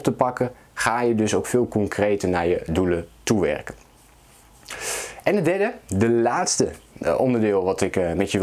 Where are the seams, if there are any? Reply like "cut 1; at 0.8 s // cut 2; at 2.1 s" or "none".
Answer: none